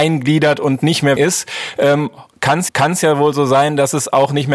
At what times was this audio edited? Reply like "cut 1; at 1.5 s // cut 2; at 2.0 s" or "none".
cut 1; at 1.2 s // cut 2; at 2.7 s